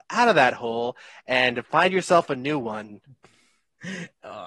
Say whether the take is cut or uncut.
uncut